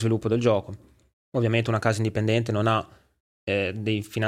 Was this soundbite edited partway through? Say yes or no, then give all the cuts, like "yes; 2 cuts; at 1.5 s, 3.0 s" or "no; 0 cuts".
no; 0 cuts